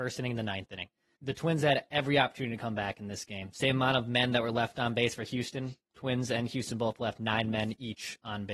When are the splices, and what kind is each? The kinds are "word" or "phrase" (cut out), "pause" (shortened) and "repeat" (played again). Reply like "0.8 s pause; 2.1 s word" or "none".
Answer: 1.2 s word